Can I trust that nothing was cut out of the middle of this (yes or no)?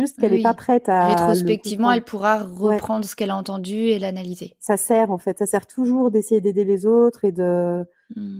yes